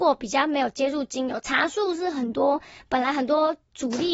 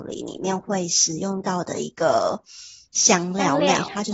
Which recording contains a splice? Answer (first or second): second